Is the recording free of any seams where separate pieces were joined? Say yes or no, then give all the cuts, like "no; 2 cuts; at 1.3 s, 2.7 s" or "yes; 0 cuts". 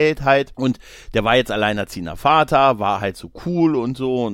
yes; 0 cuts